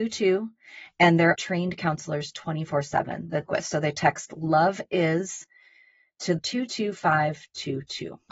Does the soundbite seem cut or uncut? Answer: cut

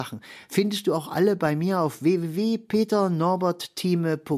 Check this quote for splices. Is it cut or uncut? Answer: uncut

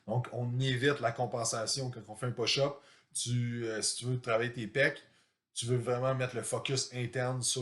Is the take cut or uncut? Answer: uncut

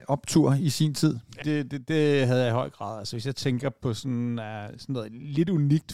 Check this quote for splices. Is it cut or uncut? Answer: cut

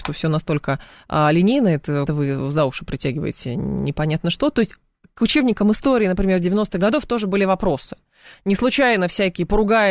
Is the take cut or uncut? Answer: cut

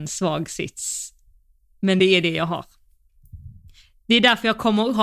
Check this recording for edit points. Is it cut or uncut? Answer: uncut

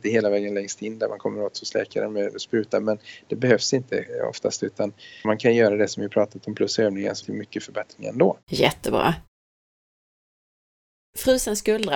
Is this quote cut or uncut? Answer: cut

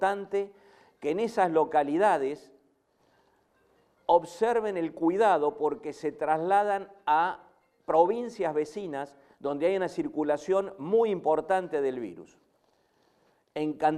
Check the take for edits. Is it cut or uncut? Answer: uncut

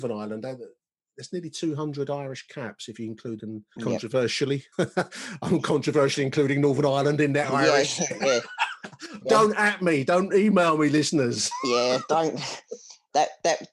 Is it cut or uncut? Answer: cut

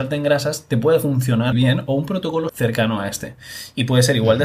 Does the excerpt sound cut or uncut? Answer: cut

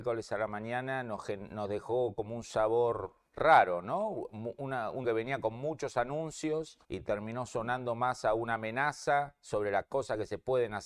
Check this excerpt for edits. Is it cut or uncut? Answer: cut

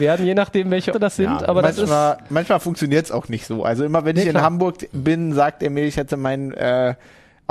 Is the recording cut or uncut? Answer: cut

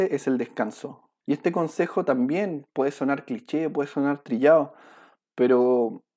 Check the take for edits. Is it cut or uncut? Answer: uncut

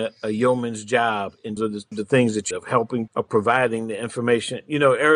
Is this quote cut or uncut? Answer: cut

